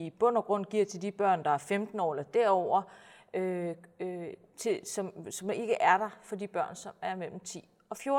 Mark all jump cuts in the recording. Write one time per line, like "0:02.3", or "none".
none